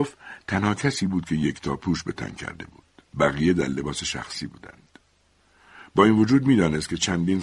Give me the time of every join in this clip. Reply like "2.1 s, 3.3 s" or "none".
3.1 s